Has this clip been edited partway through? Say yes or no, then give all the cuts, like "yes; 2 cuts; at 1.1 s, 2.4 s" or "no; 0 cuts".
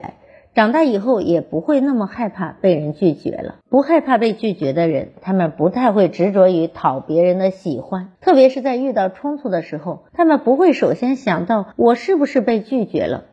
yes; 4 cuts; at 3.6 s, 8.2 s, 10.1 s, 11.7 s